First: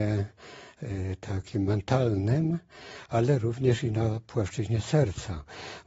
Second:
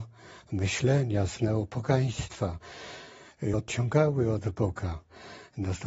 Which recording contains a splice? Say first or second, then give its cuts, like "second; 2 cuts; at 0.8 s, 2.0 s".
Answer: second; 1 cut; at 3.5 s